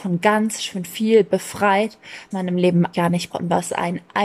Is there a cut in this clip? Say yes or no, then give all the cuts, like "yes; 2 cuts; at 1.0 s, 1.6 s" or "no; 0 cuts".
yes; 3 cuts; at 2.3 s, 2.9 s, 3.3 s